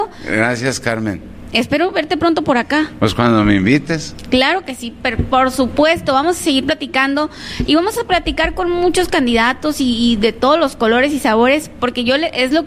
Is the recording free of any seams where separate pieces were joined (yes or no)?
yes